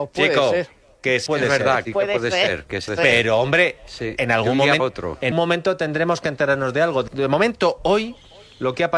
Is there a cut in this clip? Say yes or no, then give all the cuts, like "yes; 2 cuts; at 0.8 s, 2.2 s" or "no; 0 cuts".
yes; 6 cuts; at 1.3 s, 1.8 s, 2.9 s, 4.8 s, 5.3 s, 7.1 s